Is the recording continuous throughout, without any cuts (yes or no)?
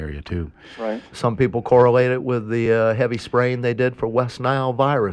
yes